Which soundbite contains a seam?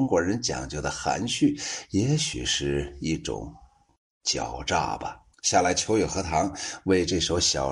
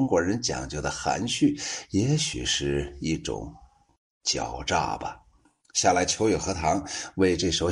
first; 1 cut; at 5.3 s

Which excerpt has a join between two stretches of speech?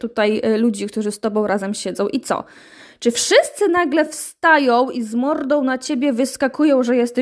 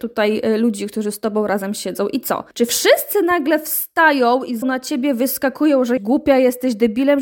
second; 3 cuts; at 2.5 s, 4.6 s, 6.0 s

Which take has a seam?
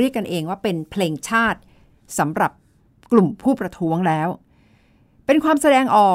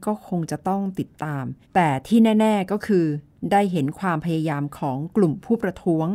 second; 1 cut; at 1.6 s

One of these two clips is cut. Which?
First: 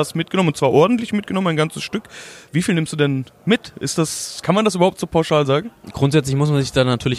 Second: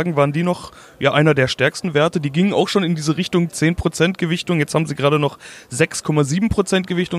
first; 1 cut; at 4.4 s

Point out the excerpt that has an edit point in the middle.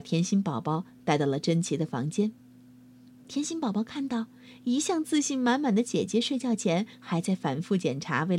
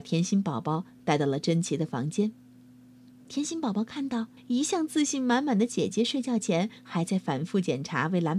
second; 1 cut; at 4.4 s

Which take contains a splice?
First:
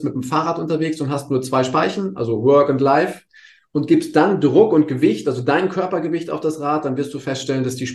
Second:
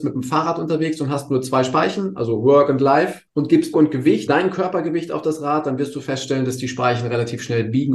second; 3 cuts; at 3.3 s, 3.7 s, 4.3 s

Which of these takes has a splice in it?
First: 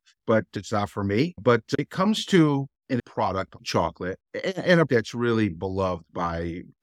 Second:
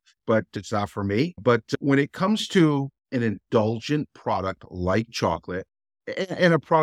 first; 5 cuts; at 1.8 s, 3.0 s, 3.6 s, 4.3 s, 4.9 s

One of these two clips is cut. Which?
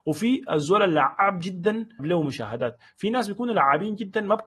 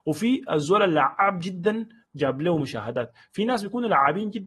first; 1 cut; at 2.0 s

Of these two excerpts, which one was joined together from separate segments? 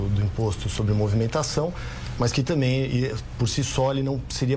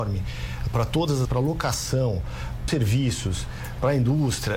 second; 2 cuts; at 1.2 s, 2.7 s

